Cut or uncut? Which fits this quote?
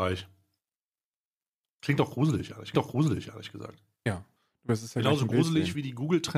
cut